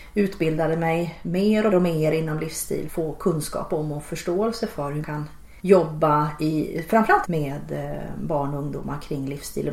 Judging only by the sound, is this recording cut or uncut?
cut